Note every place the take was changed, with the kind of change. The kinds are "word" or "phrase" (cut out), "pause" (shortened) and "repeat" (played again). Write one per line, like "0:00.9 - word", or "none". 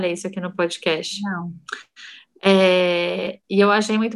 none